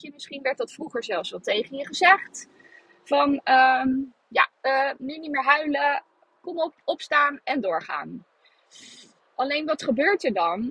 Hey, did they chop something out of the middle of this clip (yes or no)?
no